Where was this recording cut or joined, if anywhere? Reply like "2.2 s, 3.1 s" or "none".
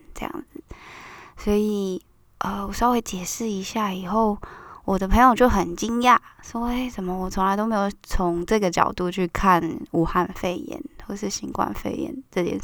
none